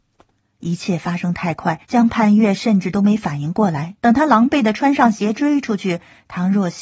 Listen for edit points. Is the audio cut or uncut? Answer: cut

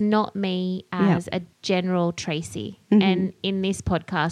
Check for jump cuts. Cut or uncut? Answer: cut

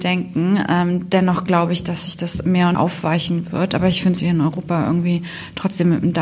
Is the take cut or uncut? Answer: cut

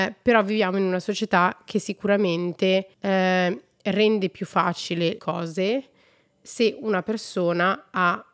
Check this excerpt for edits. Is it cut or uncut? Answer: cut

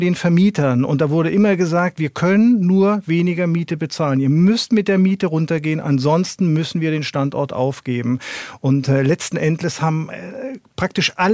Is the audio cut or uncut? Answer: uncut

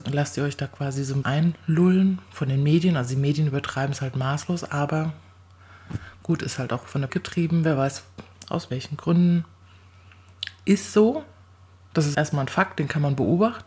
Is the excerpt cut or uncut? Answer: cut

